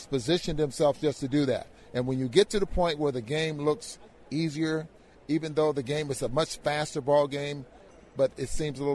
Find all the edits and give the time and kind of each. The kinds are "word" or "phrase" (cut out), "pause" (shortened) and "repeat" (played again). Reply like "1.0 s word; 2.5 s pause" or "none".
none